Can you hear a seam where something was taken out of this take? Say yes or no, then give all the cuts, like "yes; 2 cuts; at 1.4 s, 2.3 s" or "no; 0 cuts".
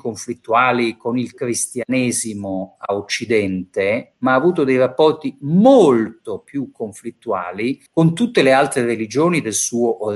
yes; 1 cut; at 7.9 s